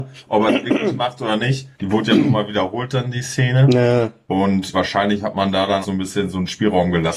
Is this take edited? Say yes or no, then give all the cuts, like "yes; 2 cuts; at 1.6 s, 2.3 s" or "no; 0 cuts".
yes; 3 cuts; at 1.7 s, 4.7 s, 5.8 s